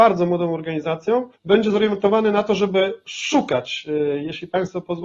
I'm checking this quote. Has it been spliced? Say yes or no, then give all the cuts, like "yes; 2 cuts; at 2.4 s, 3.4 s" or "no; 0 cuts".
yes; 1 cut; at 1.4 s